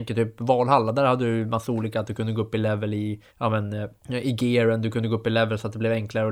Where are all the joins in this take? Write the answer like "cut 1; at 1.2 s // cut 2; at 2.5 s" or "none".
cut 1; at 3.3 s // cut 2; at 4.0 s